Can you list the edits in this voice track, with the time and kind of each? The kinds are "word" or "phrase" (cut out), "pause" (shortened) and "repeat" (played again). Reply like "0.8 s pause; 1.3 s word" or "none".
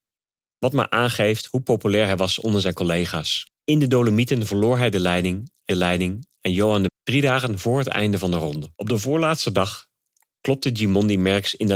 3.6 s pause; 5.7 s repeat; 6.9 s word; 8.7 s pause